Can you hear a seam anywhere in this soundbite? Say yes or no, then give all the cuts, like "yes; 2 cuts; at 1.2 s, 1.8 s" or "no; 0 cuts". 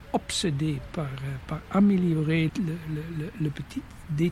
yes; 1 cut; at 2.5 s